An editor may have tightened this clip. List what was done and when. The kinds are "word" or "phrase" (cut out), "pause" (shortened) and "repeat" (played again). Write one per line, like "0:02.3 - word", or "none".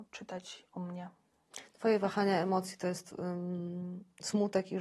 none